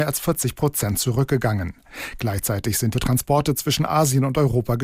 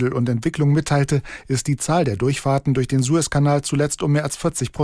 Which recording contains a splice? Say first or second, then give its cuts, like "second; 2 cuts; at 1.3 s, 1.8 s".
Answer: first; 1 cut; at 2.9 s